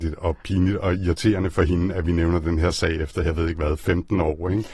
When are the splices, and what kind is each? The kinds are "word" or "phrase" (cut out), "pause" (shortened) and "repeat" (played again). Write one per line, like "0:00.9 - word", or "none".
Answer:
none